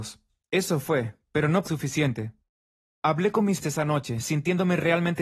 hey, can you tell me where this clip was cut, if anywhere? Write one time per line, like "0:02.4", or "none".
0:01.6
0:03.6